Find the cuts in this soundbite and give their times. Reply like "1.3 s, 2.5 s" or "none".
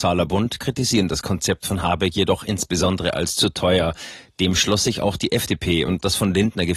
none